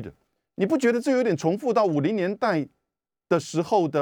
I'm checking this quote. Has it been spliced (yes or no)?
no